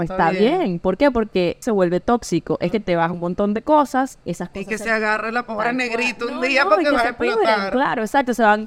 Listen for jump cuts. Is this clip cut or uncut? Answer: cut